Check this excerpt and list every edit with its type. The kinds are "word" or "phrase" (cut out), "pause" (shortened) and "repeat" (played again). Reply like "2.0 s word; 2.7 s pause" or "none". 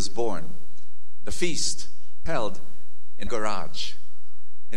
1.3 s word; 2.3 s word; 3.3 s word